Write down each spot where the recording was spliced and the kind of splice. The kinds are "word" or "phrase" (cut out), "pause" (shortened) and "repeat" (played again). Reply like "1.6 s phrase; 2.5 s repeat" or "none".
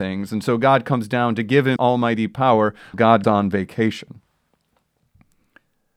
1.8 s word; 2.9 s word; 3.2 s word